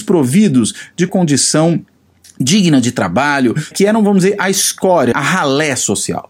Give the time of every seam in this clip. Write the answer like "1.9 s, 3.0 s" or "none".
1.1 s, 3.7 s, 5.1 s